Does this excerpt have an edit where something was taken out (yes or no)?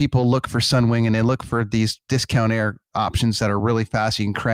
no